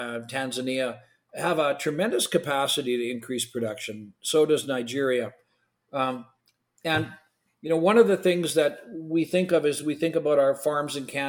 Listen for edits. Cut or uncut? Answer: uncut